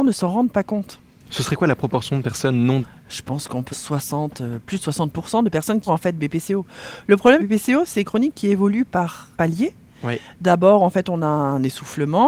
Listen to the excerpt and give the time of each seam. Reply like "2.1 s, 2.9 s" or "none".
2.8 s, 3.7 s, 5.9 s, 7.4 s, 8.0 s, 9.3 s